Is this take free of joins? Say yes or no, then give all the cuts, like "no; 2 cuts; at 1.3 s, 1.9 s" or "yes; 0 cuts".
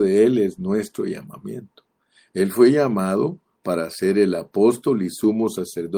yes; 0 cuts